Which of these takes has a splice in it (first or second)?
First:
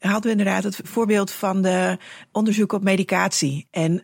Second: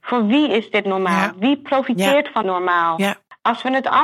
second